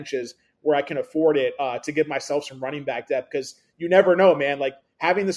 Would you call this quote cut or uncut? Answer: uncut